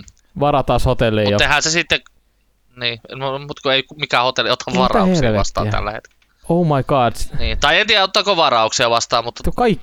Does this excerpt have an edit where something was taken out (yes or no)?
yes